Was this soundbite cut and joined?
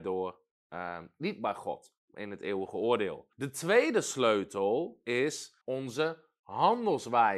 yes; 2 cuts; at 3.3 s, 5.6 s

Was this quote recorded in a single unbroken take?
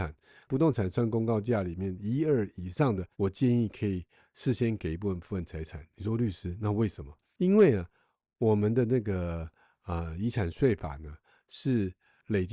no; 1 cut; at 3.1 s

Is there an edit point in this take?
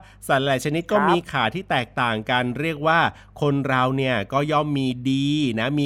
no; 0 cuts

